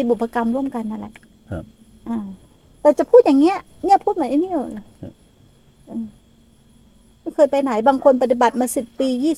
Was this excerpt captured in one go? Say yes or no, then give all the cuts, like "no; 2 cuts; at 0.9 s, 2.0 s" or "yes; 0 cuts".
yes; 0 cuts